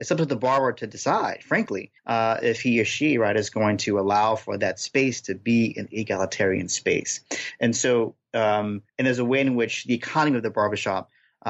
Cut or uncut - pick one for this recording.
cut